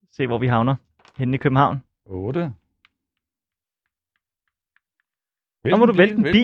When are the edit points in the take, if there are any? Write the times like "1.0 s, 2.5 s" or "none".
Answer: none